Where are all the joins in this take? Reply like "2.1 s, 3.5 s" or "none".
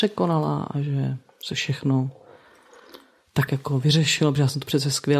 3.5 s